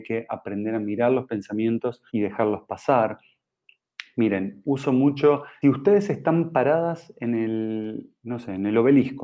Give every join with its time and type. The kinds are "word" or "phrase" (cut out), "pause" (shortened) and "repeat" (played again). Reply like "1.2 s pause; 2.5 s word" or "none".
2.1 s pause; 4.6 s word; 5.6 s phrase